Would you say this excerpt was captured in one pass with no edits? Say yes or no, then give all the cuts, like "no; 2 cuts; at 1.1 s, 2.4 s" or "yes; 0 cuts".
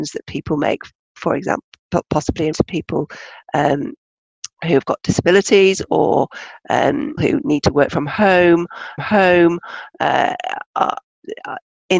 no; 3 cuts; at 2.5 s, 7.2 s, 9.0 s